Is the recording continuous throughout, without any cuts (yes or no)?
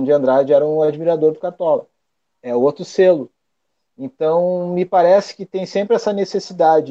yes